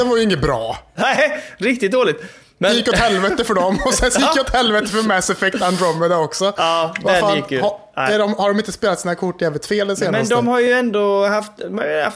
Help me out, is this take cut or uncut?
uncut